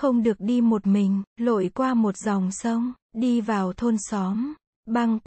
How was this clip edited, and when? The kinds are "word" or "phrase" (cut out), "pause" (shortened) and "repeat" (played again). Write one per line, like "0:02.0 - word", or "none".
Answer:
0:01.3 - pause
0:03.0 - pause